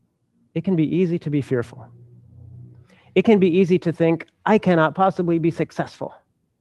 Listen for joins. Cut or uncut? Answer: uncut